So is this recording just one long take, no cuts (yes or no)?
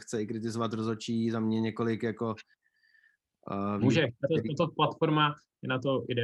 yes